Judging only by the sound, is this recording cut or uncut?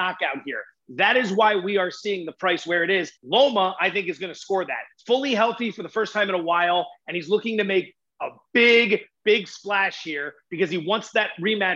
cut